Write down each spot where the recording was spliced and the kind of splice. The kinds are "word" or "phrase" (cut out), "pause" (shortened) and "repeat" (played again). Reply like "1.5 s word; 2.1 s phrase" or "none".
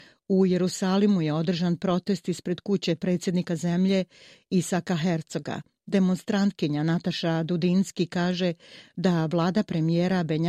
none

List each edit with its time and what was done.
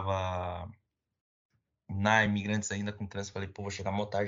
none

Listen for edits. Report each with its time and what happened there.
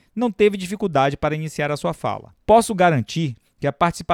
2.4 s pause

